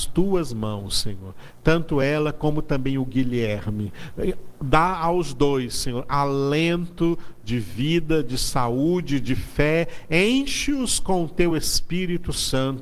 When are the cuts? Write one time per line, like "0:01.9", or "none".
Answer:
none